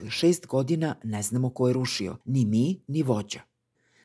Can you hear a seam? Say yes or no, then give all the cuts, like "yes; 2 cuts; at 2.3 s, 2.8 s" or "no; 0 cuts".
yes; 1 cut; at 2.2 s